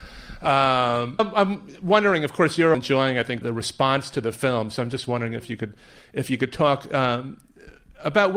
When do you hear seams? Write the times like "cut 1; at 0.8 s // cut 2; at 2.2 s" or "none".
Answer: cut 1; at 1.2 s // cut 2; at 2.7 s // cut 3; at 3.4 s

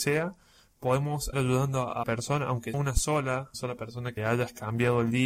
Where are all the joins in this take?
cut 1; at 1.3 s // cut 2; at 2.0 s // cut 3; at 2.7 s // cut 4; at 3.5 s // cut 5; at 4.2 s

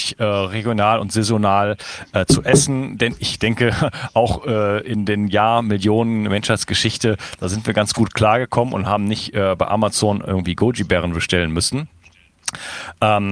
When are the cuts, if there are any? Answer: none

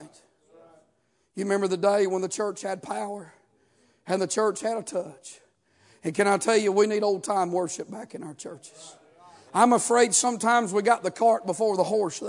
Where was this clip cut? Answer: none

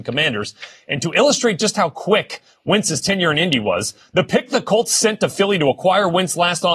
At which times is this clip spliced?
none

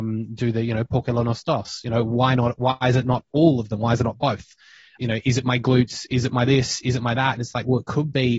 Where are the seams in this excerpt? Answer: cut 1; at 5.0 s

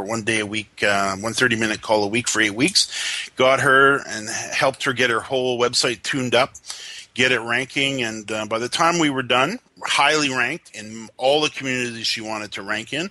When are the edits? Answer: cut 1; at 9.7 s

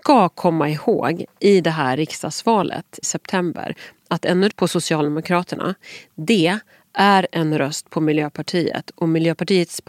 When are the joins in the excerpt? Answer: cut 1; at 1.4 s // cut 2; at 3.0 s // cut 3; at 4.5 s

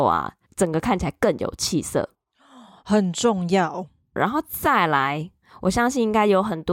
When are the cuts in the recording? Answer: none

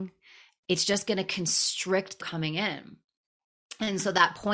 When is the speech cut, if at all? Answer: cut 1; at 2.2 s

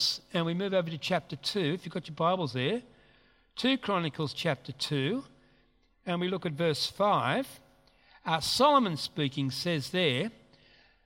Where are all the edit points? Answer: none

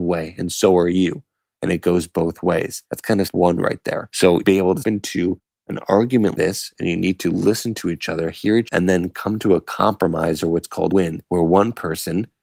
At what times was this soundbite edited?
cut 1; at 3.3 s // cut 2; at 4.4 s // cut 3; at 4.8 s // cut 4; at 6.3 s // cut 5; at 8.7 s // cut 6; at 10.9 s

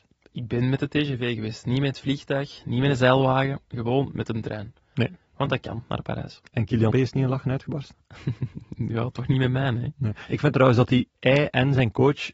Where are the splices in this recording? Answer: cut 1; at 6.9 s // cut 2; at 11.1 s

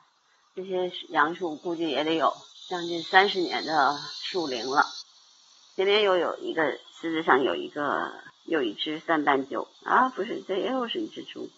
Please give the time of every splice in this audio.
cut 1; at 9.7 s

